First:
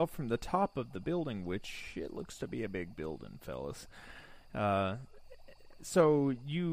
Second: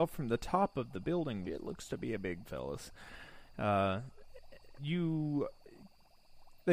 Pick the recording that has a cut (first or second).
second